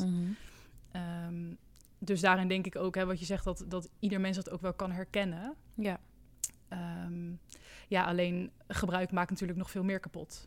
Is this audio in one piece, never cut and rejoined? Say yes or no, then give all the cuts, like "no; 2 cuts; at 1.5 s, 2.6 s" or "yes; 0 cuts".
no; 1 cut; at 8.6 s